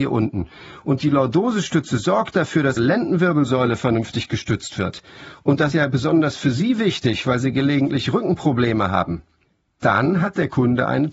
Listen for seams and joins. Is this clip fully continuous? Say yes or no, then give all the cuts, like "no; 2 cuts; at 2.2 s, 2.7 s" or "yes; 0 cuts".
no; 3 cuts; at 2.8 s, 5.7 s, 9.4 s